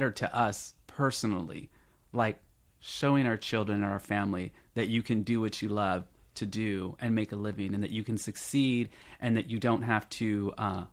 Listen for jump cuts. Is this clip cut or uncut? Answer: uncut